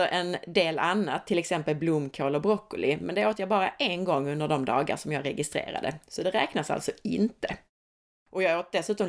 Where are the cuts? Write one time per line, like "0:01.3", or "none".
none